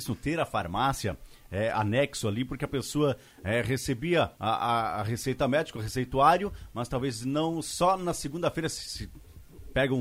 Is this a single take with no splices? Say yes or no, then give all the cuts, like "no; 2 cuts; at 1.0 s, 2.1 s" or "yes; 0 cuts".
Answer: no; 1 cut; at 4.4 s